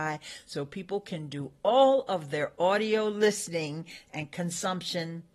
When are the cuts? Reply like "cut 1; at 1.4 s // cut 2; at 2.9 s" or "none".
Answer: none